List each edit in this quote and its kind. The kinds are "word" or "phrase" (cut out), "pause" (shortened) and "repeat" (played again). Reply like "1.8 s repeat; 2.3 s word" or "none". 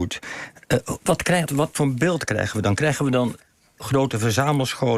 1.5 s word